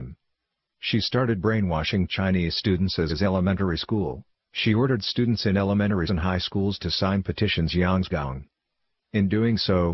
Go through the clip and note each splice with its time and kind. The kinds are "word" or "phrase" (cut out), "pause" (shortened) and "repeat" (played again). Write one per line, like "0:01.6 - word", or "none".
0:03.1 - word
0:04.3 - pause
0:06.1 - word
0:07.7 - word
0:08.1 - phrase